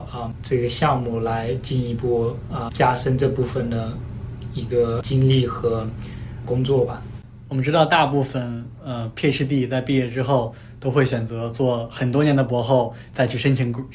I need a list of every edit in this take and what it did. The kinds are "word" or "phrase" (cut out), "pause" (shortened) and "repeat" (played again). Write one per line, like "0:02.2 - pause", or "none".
0:02.7 - word